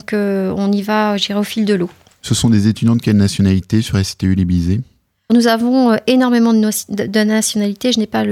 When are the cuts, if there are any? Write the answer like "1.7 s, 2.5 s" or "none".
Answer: 5.3 s